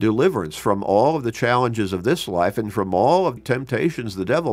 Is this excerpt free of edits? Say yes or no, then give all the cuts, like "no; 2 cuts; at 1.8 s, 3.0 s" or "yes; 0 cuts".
no; 1 cut; at 3.4 s